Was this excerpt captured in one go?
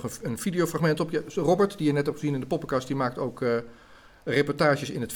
yes; 0 cuts

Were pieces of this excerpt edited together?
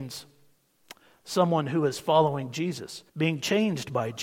yes; 1 cut; at 3.1 s

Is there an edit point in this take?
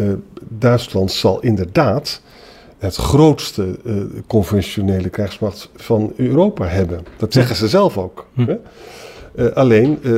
no; 0 cuts

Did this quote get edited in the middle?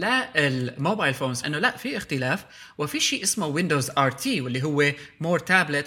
yes; 1 cut; at 1.4 s

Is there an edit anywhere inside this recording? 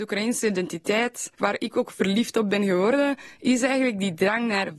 yes; 1 cut; at 1.3 s

